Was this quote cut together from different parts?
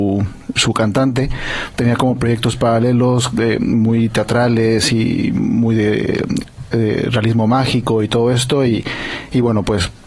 yes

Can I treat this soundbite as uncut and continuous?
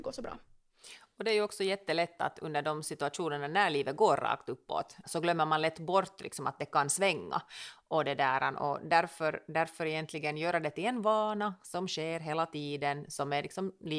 no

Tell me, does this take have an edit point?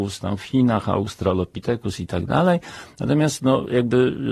no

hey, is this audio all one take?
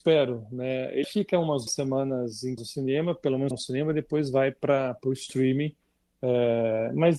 no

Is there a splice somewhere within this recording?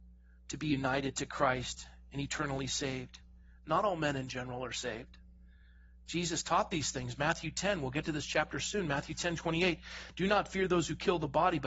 no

